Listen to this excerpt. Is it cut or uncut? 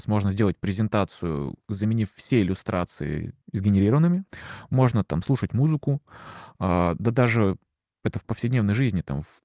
cut